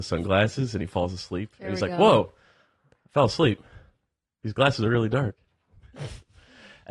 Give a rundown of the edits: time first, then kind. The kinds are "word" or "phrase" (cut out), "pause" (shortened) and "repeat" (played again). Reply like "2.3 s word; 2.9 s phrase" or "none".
none